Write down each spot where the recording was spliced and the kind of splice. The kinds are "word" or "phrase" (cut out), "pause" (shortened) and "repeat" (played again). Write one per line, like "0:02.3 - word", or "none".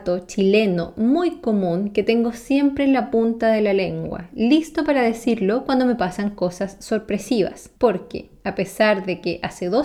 0:07.8 - pause